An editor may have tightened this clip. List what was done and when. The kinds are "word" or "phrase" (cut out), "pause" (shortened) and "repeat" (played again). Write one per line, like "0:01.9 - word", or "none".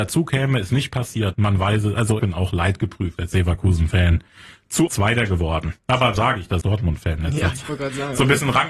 0:01.3 - word
0:02.2 - word
0:04.9 - word
0:06.2 - word
0:06.6 - word